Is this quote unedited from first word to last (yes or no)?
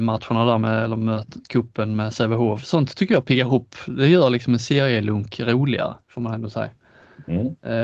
no